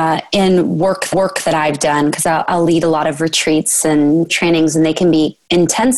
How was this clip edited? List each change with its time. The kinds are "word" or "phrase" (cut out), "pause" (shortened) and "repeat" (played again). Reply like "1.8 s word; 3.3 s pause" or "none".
1.1 s repeat; 4.3 s word